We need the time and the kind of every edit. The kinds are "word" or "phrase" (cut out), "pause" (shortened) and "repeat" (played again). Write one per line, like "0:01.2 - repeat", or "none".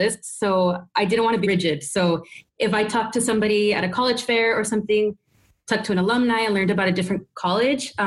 0:01.4 - word